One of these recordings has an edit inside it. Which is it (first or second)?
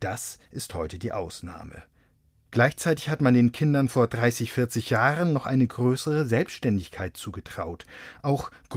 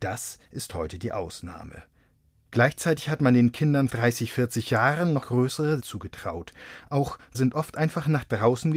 second